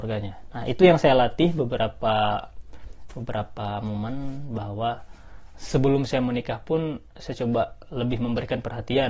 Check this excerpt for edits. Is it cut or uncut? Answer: cut